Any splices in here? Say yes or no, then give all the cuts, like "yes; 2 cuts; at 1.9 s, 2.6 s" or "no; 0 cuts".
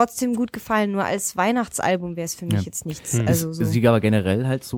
no; 0 cuts